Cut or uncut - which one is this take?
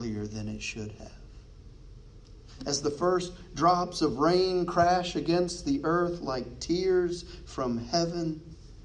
uncut